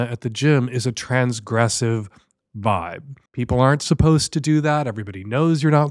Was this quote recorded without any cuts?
no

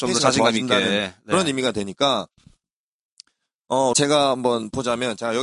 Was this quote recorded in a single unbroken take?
no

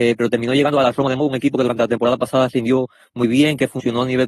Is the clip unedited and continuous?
yes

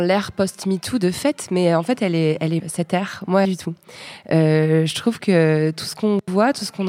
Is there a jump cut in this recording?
yes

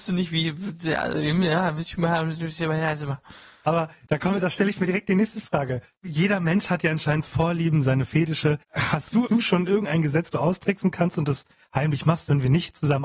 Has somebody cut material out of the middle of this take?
yes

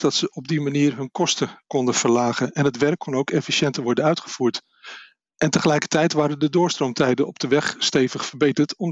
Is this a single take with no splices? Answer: yes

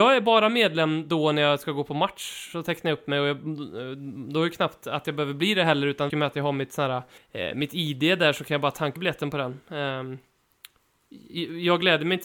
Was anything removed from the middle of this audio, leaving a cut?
yes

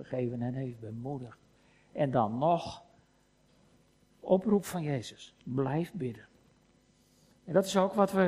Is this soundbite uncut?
no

